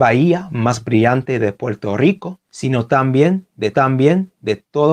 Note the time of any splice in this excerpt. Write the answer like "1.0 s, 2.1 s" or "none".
2.4 s, 3.7 s